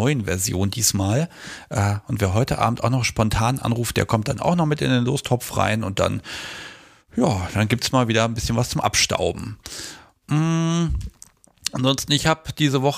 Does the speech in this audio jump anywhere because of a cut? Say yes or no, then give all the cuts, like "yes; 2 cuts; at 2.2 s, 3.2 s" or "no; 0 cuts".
no; 0 cuts